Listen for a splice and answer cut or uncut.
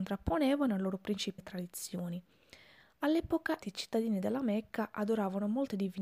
cut